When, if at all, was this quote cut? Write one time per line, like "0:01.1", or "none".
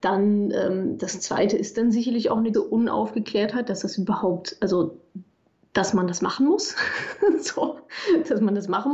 0:02.5